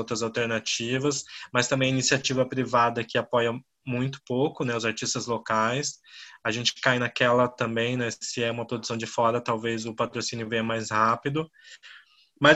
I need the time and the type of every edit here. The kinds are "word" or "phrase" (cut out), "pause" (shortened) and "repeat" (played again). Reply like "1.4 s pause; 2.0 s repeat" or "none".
none